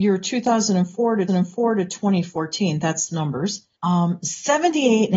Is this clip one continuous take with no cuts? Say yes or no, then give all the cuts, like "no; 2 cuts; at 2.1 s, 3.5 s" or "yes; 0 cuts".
no; 3 cuts; at 1.3 s, 3.1 s, 3.7 s